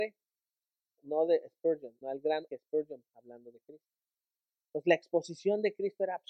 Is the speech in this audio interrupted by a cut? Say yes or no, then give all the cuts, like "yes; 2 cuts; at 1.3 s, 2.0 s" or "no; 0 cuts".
yes; 4 cuts; at 1.0 s, 2.0 s, 2.5 s, 3.0 s